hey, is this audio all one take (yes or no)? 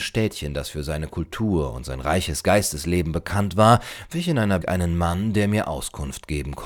no